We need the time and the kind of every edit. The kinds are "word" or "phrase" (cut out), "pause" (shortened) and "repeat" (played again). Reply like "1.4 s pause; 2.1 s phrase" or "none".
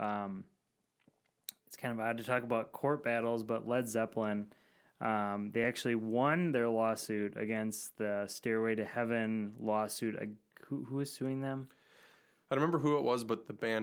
none

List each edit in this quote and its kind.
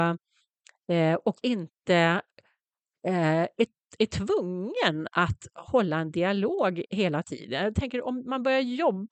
none

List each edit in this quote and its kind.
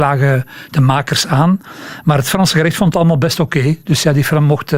none

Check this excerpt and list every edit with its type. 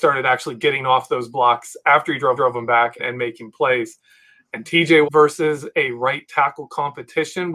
2.4 s repeat; 3.0 s word; 5.0 s word

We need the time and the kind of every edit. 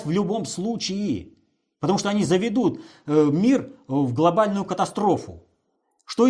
none

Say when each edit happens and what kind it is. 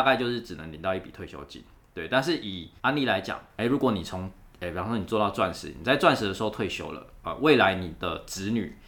2.8 s pause

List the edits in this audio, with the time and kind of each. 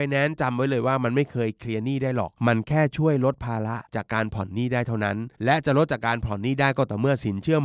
2.4 s pause; 3.9 s pause; 5.3 s pause

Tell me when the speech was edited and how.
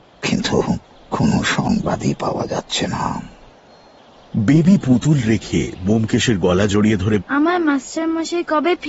0.9 s pause; 7.2 s word

